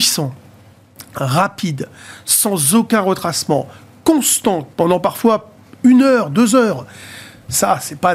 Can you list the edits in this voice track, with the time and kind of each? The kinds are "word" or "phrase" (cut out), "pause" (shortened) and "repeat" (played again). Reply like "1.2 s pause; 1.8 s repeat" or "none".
4.7 s pause